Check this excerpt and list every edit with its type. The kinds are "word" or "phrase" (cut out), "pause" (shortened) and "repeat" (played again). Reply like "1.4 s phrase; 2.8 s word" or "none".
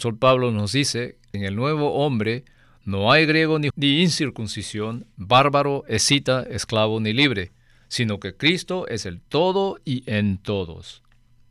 1.3 s word; 3.7 s phrase

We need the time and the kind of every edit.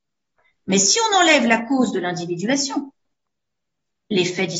none

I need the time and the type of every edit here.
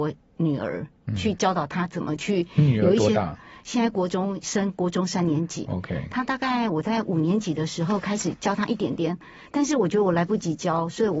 none

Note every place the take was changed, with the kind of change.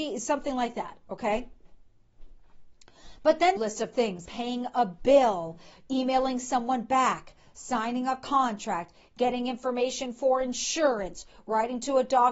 3.6 s phrase; 4.3 s word

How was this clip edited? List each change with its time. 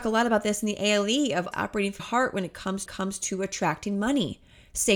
1.5 s word; 2.0 s word; 2.9 s repeat

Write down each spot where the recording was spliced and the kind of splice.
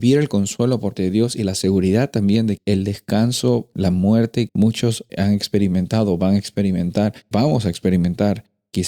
1.0 s word; 2.6 s word; 3.7 s word; 4.5 s word; 5.1 s word; 7.3 s word

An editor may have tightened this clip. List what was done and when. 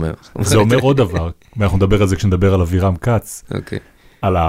none

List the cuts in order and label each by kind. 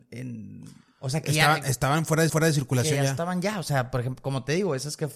2.3 s repeat

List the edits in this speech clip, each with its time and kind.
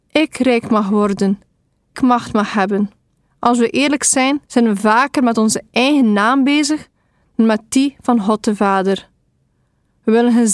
1.9 s word; 3.2 s pause; 4.5 s pause

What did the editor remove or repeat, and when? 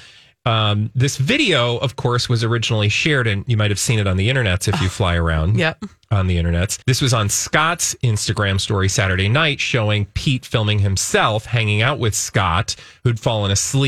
6.8 s pause

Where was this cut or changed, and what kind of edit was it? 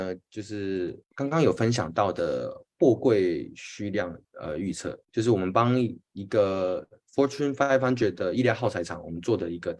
1.0 s pause; 4.2 s pause; 5.0 s pause

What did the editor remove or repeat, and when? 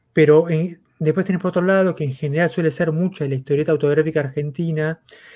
none

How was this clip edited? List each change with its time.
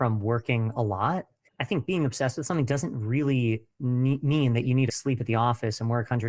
3.7 s pause; 4.9 s word

